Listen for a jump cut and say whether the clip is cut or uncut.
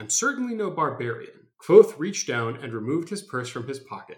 cut